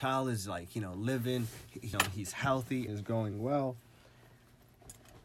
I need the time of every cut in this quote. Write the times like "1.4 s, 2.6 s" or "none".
1.9 s, 2.9 s